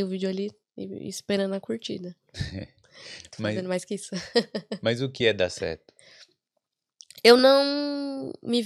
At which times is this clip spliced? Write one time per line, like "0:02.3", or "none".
none